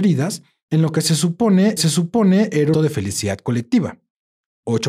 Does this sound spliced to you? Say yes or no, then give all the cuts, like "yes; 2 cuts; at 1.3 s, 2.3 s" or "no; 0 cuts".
yes; 2 cuts; at 1.8 s, 2.7 s